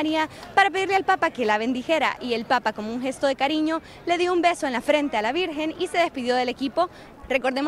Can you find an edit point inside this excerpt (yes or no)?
no